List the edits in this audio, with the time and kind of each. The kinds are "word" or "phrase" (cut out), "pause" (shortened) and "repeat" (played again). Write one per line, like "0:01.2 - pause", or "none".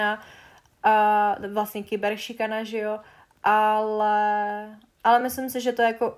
none

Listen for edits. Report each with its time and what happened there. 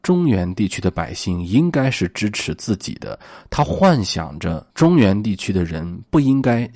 0:04.7 - pause

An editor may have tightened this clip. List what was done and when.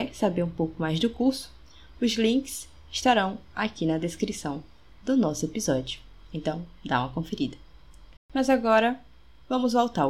0:08.2 - pause

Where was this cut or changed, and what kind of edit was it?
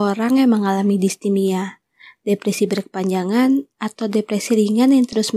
none

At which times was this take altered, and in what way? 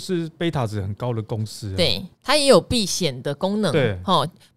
0:02.1 - pause

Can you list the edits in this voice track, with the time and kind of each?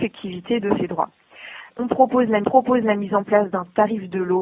0:01.7 - pause
0:02.4 - repeat

